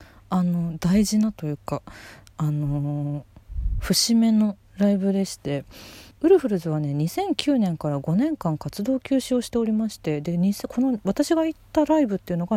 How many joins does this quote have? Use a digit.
1